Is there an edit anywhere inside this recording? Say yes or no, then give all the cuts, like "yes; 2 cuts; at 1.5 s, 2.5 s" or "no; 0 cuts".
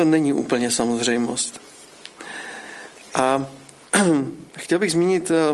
yes; 1 cut; at 4.5 s